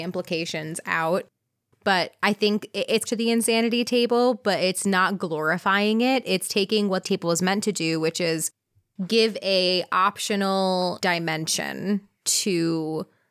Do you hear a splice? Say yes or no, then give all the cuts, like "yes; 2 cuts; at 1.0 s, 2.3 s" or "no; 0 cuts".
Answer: yes; 3 cuts; at 3.1 s, 7.0 s, 11.0 s